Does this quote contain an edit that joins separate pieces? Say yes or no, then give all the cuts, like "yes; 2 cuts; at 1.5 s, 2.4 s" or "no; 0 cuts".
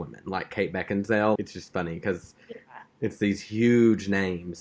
yes; 1 cut; at 1.4 s